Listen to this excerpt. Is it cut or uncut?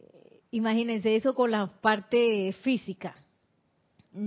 uncut